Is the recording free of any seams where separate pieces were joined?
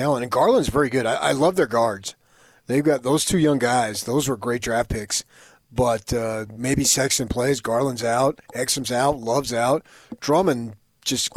yes; 0 cuts

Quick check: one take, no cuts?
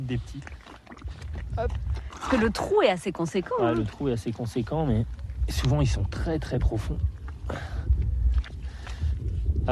yes; 0 cuts

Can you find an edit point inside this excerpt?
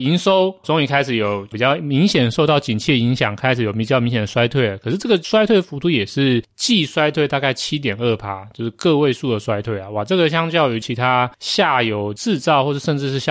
no; 0 cuts

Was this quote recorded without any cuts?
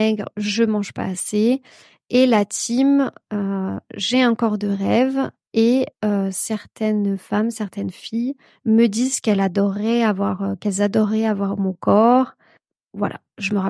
yes; 0 cuts

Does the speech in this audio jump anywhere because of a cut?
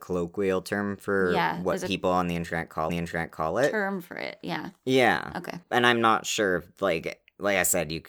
yes; 2 cuts; at 2.9 s, 5.6 s

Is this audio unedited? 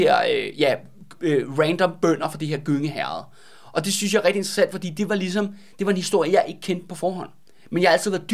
yes; 0 cuts

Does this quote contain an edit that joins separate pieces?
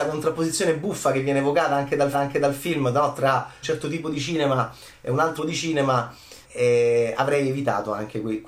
yes; 4 cuts; at 2.1 s, 3.6 s, 5.4 s, 6.4 s

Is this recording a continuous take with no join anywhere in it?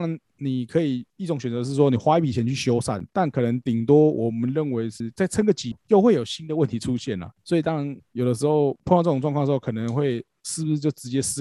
no; 1 cut; at 3.1 s

